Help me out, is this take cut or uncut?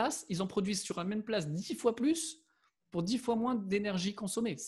uncut